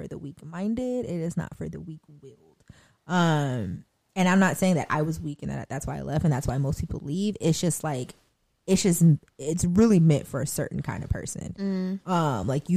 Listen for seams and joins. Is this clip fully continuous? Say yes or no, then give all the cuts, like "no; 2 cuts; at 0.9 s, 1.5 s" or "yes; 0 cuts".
yes; 0 cuts